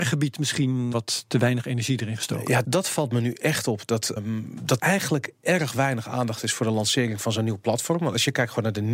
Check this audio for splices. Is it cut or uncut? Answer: cut